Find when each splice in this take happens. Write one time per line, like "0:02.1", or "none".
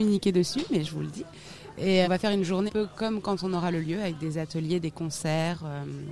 0:02.0
0:02.7